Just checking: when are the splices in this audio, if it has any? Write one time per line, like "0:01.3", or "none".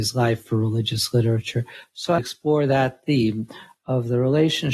0:02.2